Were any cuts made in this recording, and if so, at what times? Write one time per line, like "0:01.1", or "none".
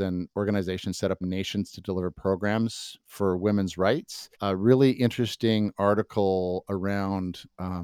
0:01.2
0:03.0
0:04.3